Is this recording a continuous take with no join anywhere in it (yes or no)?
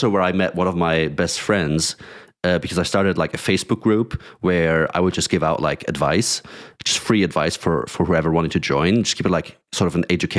yes